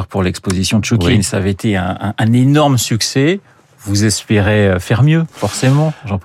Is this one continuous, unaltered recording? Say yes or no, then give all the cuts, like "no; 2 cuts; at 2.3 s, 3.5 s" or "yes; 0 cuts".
yes; 0 cuts